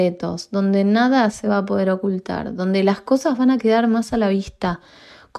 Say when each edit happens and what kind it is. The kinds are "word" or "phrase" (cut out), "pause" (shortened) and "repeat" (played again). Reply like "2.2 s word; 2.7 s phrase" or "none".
none